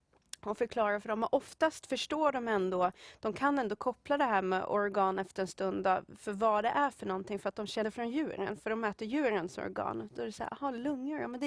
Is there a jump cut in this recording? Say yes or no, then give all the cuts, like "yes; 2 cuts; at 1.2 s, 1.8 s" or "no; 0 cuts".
yes; 1 cut; at 7.8 s